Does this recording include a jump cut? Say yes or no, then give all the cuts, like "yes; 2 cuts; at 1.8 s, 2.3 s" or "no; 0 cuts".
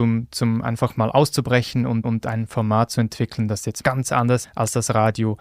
yes; 3 cuts; at 2.0 s, 3.8 s, 4.4 s